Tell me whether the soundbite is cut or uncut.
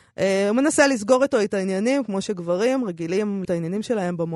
cut